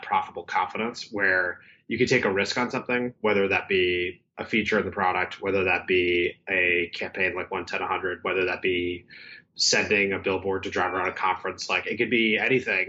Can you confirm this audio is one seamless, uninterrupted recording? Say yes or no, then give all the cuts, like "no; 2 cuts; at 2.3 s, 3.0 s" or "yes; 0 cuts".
yes; 0 cuts